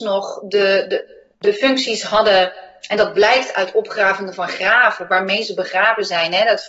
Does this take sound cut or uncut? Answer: cut